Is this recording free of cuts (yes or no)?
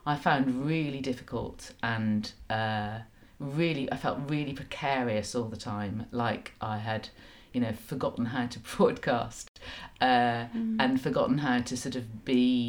yes